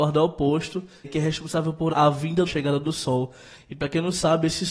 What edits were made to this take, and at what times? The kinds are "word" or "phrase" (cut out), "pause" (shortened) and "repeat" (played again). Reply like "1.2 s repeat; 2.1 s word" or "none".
1.0 s word; 1.9 s word; 2.5 s phrase

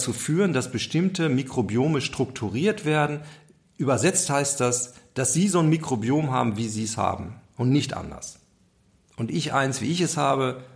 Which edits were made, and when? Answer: none

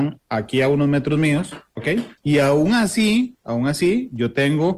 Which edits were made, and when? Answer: 2.2 s pause

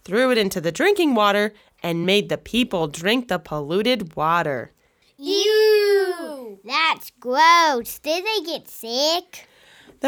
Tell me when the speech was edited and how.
none

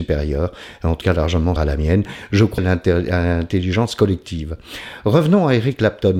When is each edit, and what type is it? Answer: 1.0 s word; 1.6 s word; 2.6 s word

